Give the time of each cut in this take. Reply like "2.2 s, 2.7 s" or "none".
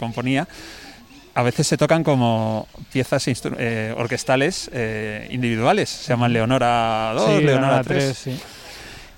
none